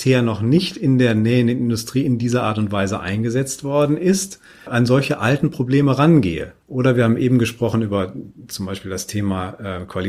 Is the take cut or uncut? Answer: cut